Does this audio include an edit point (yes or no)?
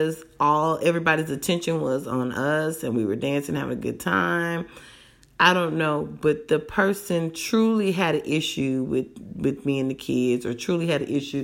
no